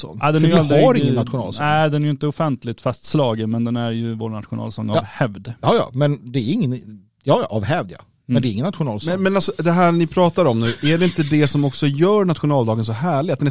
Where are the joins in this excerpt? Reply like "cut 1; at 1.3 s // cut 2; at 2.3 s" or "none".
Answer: none